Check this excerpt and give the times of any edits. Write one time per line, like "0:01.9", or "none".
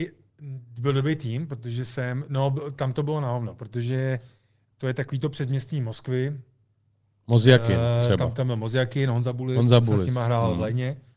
none